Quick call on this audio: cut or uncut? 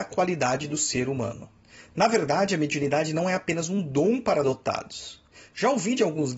uncut